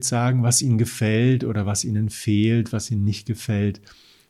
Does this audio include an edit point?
no; 0 cuts

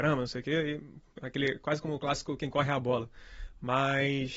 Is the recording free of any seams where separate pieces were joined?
yes; 0 cuts

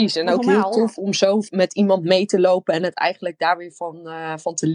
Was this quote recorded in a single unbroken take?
yes; 0 cuts

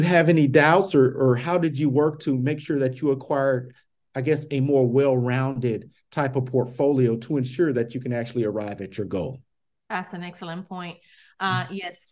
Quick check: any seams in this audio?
no; 0 cuts

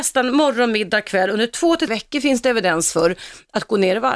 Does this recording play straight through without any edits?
no; 1 cut; at 1.9 s

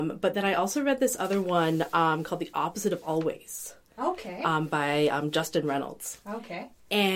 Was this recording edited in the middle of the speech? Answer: no; 0 cuts

